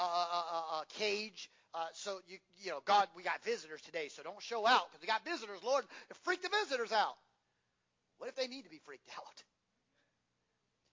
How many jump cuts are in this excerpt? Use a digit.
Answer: 0